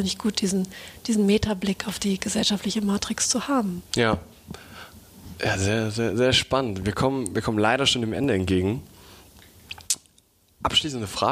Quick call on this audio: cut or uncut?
cut